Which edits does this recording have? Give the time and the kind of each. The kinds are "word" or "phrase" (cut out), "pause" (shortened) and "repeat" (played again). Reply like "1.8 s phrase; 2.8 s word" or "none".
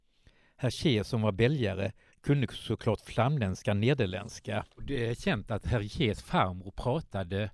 none